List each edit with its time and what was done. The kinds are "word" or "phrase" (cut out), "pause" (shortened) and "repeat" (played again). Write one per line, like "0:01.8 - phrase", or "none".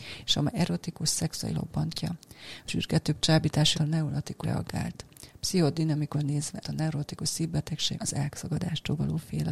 0:01.5 - word
0:02.7 - word
0:03.7 - word
0:04.4 - word
0:06.1 - word
0:06.6 - word
0:07.9 - word